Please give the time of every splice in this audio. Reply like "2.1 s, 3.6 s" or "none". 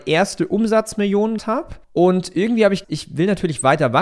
1.4 s, 1.8 s, 2.8 s